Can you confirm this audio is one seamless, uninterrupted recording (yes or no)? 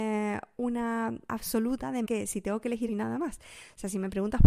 no